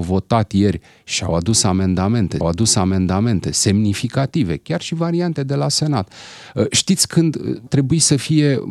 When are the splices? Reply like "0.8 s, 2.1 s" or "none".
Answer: 2.4 s, 5.4 s, 7.7 s